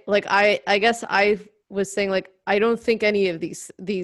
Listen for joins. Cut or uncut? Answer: uncut